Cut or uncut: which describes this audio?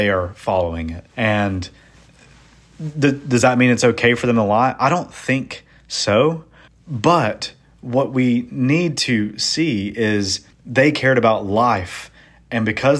cut